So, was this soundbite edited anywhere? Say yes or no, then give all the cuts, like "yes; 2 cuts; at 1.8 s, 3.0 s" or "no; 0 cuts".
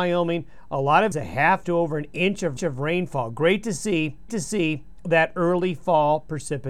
yes; 4 cuts; at 1.1 s, 1.6 s, 2.6 s, 4.3 s